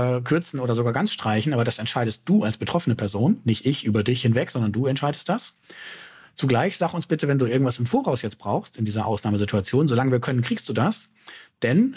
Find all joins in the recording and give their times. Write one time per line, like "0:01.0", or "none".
none